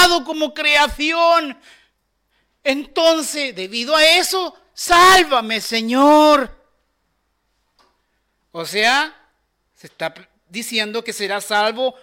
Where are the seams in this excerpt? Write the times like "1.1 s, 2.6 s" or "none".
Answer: none